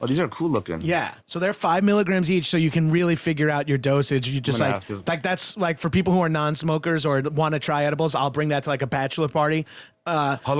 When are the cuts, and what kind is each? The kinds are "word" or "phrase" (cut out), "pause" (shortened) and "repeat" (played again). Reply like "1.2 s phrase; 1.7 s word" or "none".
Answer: 1.2 s pause